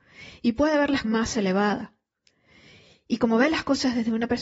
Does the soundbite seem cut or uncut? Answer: cut